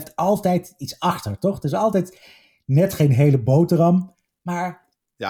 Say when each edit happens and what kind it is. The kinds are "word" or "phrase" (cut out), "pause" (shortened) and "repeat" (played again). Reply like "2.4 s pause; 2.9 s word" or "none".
none